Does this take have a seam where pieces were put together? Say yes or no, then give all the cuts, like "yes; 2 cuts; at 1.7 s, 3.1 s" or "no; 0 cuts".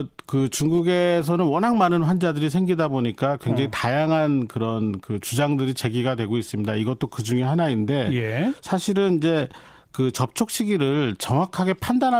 no; 0 cuts